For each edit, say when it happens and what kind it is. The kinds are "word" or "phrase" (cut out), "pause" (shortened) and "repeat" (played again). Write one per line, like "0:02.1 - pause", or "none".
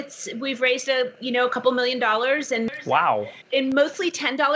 none